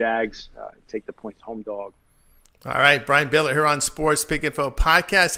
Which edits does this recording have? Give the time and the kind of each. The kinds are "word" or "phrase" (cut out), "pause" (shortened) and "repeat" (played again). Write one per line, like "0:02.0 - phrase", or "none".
none